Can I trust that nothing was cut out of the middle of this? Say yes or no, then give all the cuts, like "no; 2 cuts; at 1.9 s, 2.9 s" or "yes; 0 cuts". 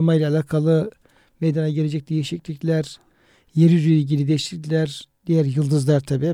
yes; 0 cuts